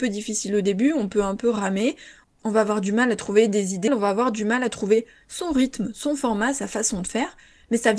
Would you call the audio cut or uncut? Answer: cut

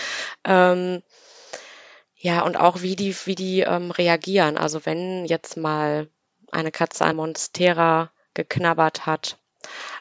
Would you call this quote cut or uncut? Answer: cut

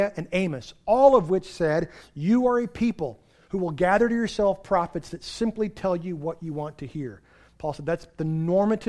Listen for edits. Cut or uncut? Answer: uncut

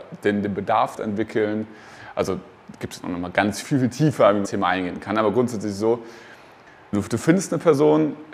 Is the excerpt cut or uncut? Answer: cut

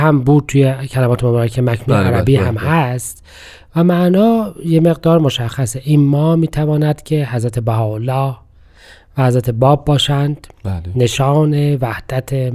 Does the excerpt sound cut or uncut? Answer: uncut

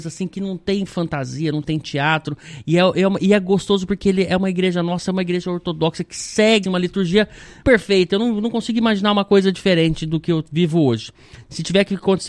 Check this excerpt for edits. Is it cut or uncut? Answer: cut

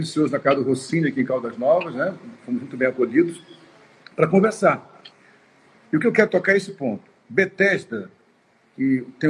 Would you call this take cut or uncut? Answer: uncut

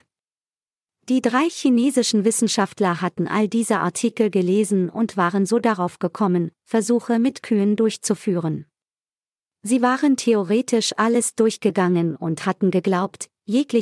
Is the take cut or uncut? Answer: uncut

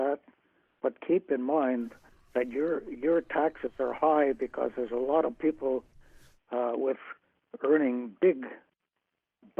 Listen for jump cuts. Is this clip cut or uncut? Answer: uncut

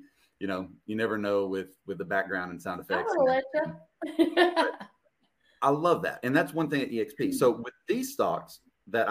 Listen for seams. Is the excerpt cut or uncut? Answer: uncut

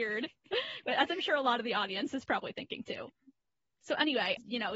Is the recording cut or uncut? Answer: uncut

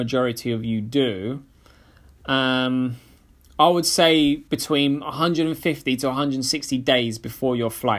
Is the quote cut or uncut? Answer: uncut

